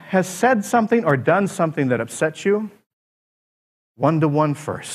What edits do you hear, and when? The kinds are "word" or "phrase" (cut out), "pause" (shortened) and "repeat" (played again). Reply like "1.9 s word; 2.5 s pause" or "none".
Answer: none